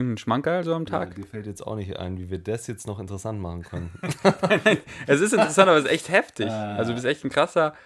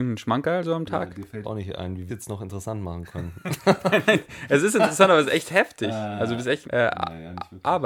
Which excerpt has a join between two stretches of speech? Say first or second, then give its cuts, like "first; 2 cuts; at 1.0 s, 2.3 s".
second; 3 cuts; at 1.4 s, 2.1 s, 6.6 s